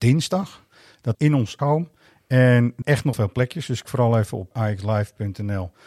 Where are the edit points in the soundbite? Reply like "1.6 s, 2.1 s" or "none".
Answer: 1.1 s, 1.6 s, 2.8 s, 3.1 s, 3.8 s, 4.5 s

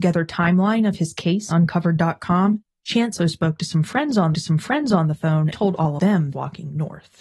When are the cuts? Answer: 1.5 s, 3.2 s, 4.3 s, 5.5 s, 6.0 s, 6.3 s

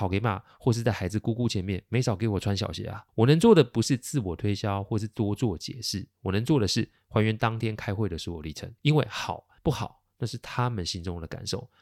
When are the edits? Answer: 3.1 s, 8.8 s, 9.6 s

